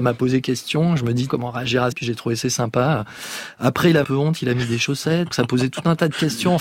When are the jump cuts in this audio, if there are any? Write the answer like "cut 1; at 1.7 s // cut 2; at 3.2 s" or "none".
cut 1; at 1.3 s // cut 2; at 1.9 s // cut 3; at 2.4 s // cut 4; at 4.0 s // cut 5; at 5.3 s